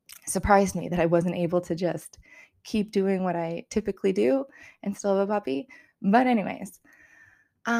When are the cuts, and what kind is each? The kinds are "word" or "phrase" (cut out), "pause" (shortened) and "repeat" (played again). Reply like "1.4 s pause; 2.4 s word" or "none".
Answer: none